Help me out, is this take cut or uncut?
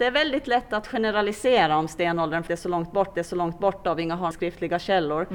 cut